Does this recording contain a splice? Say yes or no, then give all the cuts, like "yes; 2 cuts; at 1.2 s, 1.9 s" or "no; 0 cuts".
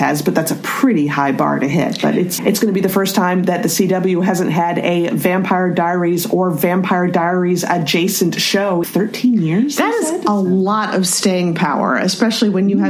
yes; 2 cuts; at 2.4 s, 8.8 s